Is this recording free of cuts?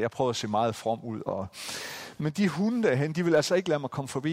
no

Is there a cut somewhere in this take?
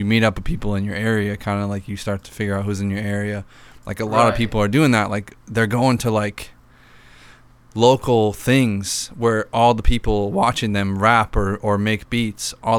no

